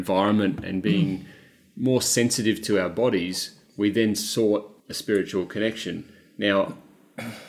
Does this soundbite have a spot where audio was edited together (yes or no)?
yes